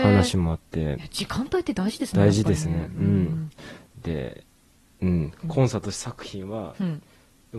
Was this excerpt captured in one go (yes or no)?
yes